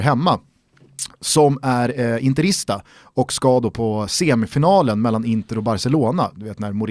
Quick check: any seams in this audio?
no; 0 cuts

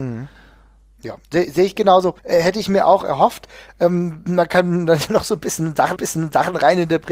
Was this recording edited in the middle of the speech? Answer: yes; 4 cuts; at 1.2 s, 2.2 s, 5.1 s, 6.0 s

